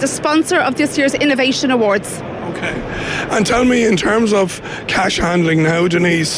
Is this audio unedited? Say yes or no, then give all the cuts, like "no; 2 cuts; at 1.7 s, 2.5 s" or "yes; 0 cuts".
yes; 0 cuts